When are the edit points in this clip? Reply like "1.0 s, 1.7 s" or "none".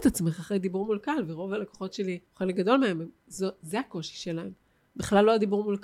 2.3 s